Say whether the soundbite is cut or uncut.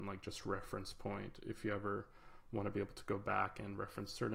uncut